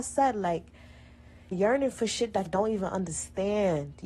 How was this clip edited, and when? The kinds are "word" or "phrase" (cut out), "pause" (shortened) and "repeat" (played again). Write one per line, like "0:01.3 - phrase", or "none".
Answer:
0:01.5 - word
0:02.5 - word